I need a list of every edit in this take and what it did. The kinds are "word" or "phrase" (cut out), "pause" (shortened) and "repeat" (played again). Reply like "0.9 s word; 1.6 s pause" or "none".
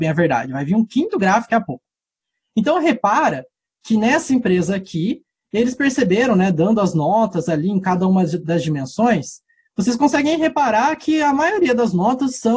1.5 s word